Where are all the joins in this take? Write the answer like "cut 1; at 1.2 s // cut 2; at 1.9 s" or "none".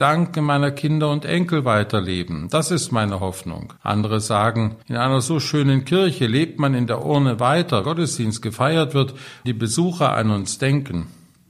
cut 1; at 3.8 s // cut 2; at 4.8 s // cut 3; at 7.8 s // cut 4; at 9.4 s